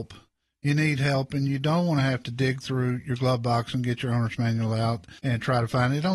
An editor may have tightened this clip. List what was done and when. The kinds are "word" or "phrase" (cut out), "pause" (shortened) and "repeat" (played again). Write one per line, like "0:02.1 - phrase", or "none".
0:05.2 - pause